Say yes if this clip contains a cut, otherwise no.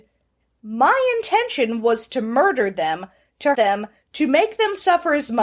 yes